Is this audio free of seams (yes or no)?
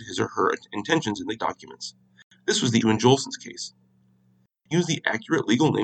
no